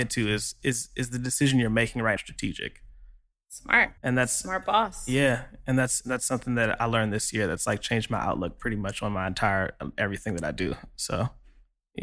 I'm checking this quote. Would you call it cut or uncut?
cut